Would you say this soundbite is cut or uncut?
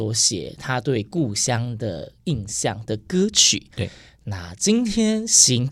uncut